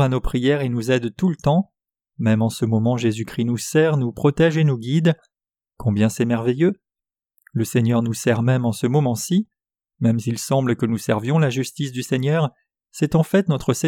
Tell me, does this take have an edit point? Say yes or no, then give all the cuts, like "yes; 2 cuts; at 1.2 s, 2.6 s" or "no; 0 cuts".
no; 0 cuts